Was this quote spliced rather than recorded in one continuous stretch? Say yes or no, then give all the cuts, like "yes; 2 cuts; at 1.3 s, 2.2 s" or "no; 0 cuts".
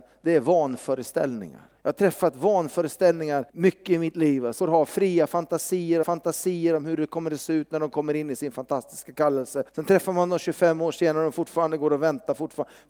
yes; 5 cuts; at 1.8 s, 3.5 s, 4.6 s, 6.0 s, 9.7 s